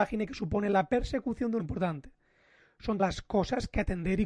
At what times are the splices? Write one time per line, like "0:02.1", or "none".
0:01.6
0:03.0